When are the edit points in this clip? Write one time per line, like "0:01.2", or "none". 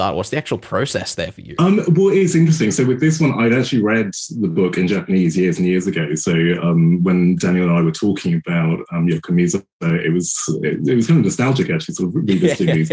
none